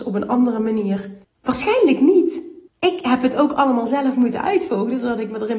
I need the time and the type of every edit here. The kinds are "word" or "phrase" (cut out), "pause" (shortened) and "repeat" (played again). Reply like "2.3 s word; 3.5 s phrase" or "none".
1.2 s pause; 2.7 s pause